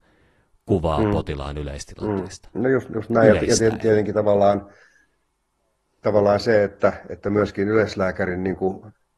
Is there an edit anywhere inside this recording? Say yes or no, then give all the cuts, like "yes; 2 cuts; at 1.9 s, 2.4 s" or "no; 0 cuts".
no; 0 cuts